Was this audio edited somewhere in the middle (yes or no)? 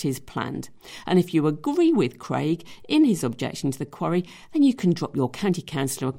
no